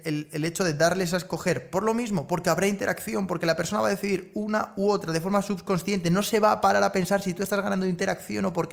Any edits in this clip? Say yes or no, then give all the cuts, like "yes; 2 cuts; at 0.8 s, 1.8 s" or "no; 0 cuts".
no; 0 cuts